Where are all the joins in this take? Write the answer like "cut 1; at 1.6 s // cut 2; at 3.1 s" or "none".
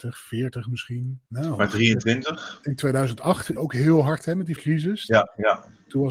cut 1; at 1.3 s // cut 2; at 3.6 s // cut 3; at 4.2 s // cut 4; at 4.6 s

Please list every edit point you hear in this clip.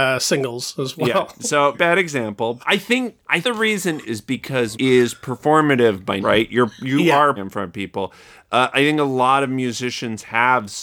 cut 1; at 1.7 s // cut 2; at 2.6 s // cut 3; at 3.4 s // cut 4; at 4.0 s // cut 5; at 4.7 s // cut 6; at 6.2 s // cut 7; at 7.4 s // cut 8; at 8.7 s

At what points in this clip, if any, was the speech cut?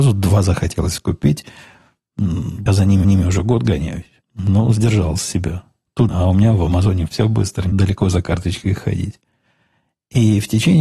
cut 1; at 2.7 s // cut 2; at 3.0 s // cut 3; at 4.2 s // cut 4; at 6.1 s // cut 5; at 7.1 s // cut 6; at 7.7 s

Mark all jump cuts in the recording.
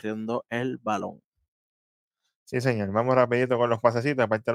none

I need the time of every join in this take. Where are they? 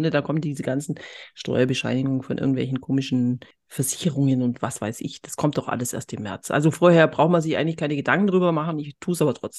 cut 1; at 3.5 s

